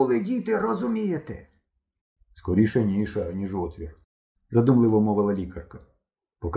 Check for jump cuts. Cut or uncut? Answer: uncut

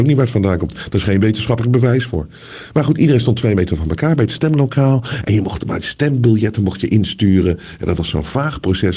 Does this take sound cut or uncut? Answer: uncut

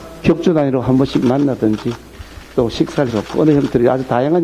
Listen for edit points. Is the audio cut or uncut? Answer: cut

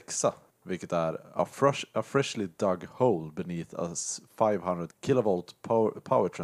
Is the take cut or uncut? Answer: uncut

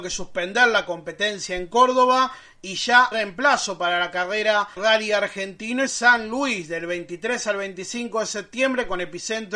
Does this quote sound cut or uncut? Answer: cut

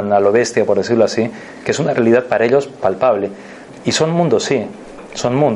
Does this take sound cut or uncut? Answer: uncut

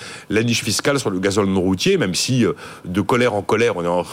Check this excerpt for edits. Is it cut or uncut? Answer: uncut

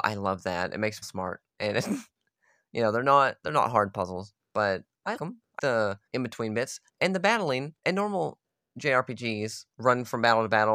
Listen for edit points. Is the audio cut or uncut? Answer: cut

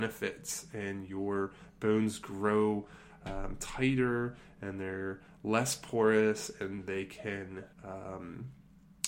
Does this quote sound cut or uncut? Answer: cut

